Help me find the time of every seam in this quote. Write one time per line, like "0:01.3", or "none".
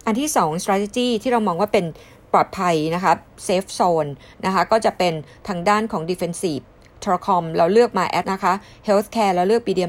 0:08.2

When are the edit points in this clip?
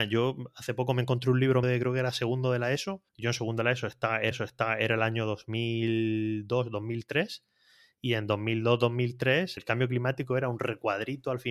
0:01.6
0:03.1
0:04.3
0:09.6

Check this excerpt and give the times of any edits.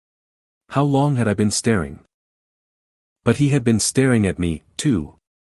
none

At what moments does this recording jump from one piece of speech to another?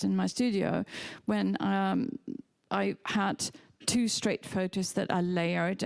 none

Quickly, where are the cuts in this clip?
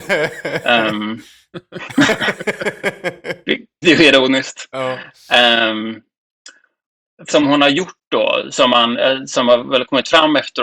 0:03.8
0:07.3

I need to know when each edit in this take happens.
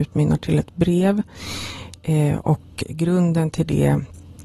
none

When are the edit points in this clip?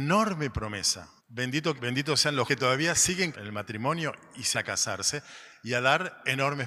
0:01.2
0:01.8
0:02.5
0:03.3
0:04.5

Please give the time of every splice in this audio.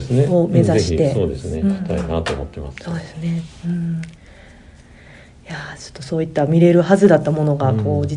none

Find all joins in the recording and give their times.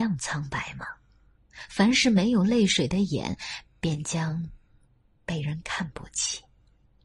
none

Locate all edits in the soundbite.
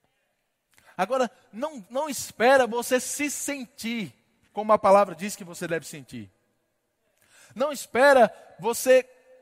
none

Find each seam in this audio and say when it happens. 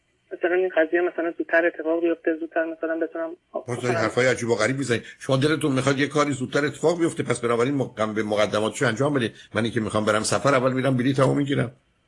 0:03.4

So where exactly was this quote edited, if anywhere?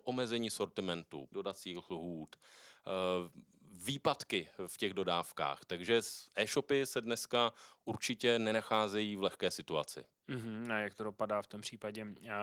0:01.3

